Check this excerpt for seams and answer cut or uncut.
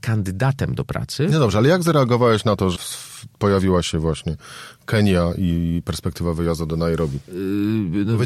cut